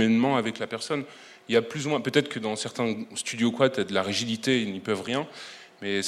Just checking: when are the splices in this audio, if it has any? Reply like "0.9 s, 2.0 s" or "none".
none